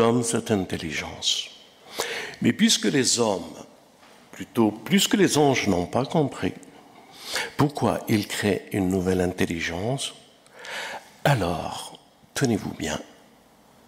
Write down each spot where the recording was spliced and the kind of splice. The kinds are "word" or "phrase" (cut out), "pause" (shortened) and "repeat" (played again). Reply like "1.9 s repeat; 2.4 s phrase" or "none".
none